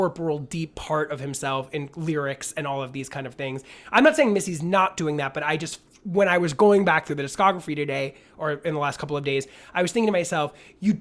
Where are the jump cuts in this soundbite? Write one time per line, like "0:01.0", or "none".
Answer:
none